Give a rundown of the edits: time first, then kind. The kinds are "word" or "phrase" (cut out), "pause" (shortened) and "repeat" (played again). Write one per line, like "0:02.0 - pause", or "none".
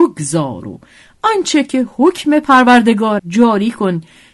0:03.2 - word

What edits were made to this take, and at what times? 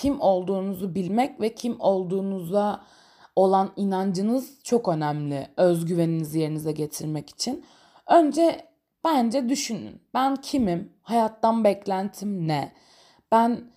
none

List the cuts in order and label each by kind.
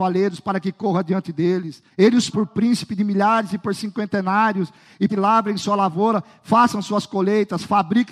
0:01.9 - pause
0:02.3 - word
0:05.1 - phrase

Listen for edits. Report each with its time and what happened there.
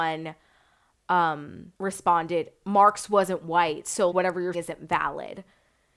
0:01.8 - pause
0:04.1 - word
0:04.5 - word

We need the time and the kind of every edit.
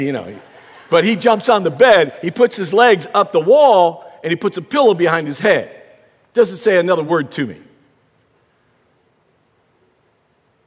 none

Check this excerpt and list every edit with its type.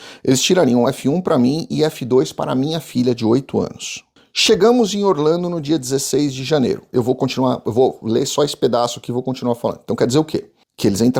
none

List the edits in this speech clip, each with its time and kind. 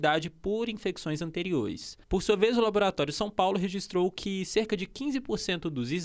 0:02.0 - pause

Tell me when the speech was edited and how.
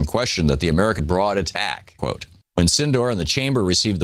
0:01.0 - phrase
0:02.0 - word
0:02.4 - pause

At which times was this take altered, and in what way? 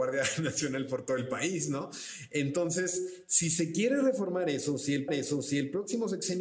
0:05.1 - repeat

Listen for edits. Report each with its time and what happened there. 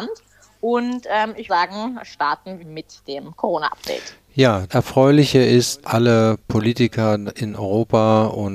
0:01.5 - word
0:02.6 - word
0:04.7 - word
0:05.8 - word

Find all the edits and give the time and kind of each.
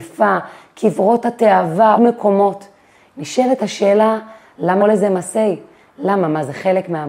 0:02.0 - word
0:04.8 - word

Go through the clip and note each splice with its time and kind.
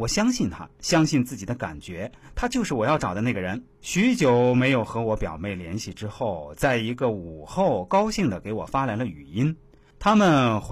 0:03.7 - pause

